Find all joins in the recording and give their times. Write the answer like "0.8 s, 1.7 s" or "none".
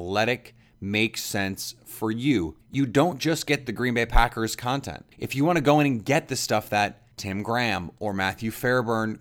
2.6 s, 5.1 s, 7.1 s